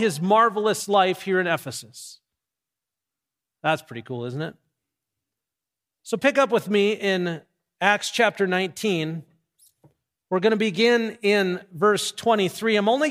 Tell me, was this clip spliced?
no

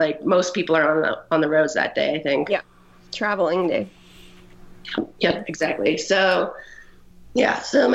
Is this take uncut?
yes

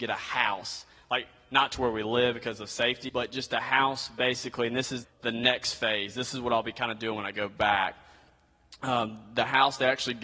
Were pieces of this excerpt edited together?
yes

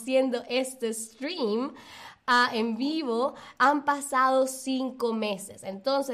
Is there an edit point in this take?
no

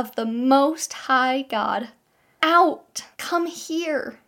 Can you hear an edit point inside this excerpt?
yes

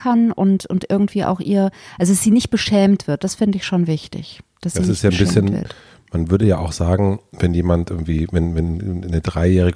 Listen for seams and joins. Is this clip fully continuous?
yes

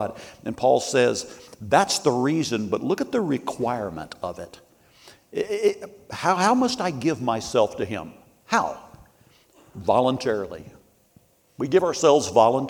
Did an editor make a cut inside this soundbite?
no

